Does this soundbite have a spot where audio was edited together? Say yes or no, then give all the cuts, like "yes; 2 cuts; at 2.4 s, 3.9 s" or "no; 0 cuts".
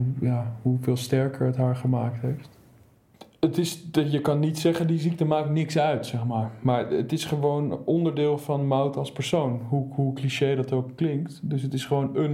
no; 0 cuts